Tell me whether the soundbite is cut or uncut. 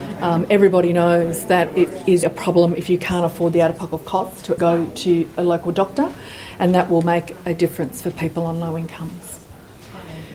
cut